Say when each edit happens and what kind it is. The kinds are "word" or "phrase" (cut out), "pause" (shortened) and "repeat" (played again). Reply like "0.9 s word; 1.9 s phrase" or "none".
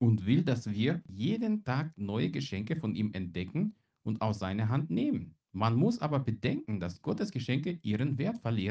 5.4 s pause

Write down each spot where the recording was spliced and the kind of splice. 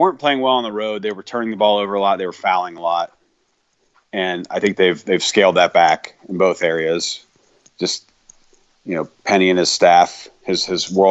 none

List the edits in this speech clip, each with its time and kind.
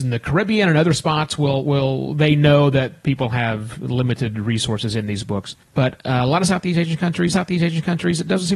5.6 s pause; 7.3 s repeat

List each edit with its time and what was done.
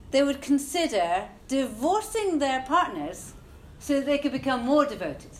1.4 s pause

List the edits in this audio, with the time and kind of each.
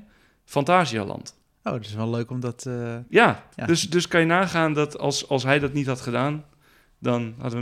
none

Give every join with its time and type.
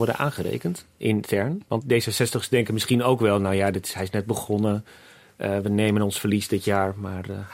1.8 s word

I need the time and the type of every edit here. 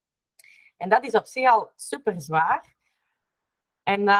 none

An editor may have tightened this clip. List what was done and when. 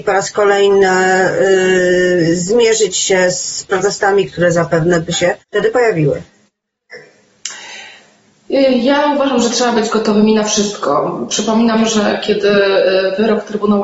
5.4 s pause

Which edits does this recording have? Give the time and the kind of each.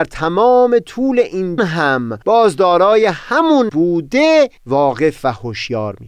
1.6 s word; 2.2 s pause; 3.7 s word; 4.6 s pause

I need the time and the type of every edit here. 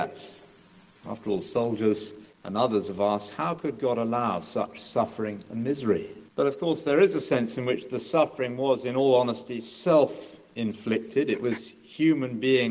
2.3 s pause; 6.3 s pause

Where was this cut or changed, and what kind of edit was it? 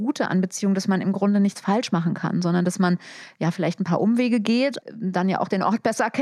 4.8 s word

